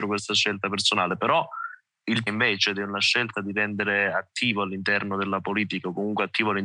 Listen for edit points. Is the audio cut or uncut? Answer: cut